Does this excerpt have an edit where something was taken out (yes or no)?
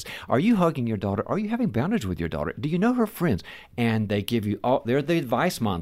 no